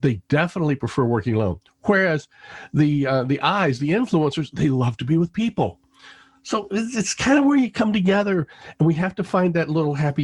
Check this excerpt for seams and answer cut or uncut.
uncut